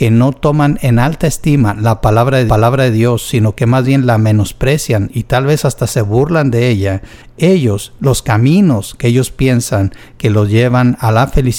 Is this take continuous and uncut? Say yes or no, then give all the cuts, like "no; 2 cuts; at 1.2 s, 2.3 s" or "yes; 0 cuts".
no; 1 cut; at 2.5 s